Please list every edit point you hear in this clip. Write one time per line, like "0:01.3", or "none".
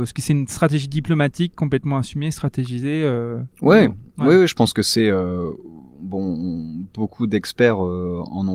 0:03.5